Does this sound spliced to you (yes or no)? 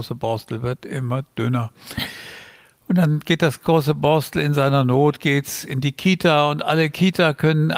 no